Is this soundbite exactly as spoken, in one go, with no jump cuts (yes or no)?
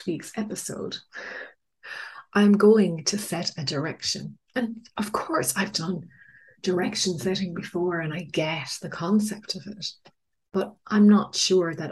yes